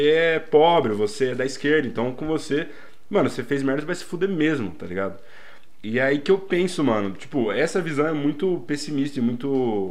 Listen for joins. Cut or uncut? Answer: uncut